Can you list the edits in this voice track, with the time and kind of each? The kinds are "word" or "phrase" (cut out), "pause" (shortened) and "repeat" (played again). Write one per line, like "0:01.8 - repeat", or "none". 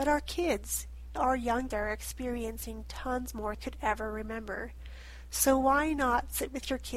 0:01.2 - word
0:01.7 - word
0:03.5 - phrase